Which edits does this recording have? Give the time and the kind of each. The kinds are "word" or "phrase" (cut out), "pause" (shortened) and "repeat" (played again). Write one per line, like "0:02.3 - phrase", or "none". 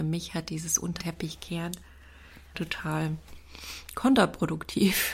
0:01.0 - word
0:02.5 - word